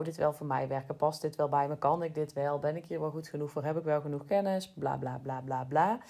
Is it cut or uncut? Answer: uncut